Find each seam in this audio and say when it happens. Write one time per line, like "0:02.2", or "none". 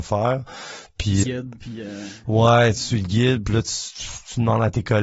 0:01.2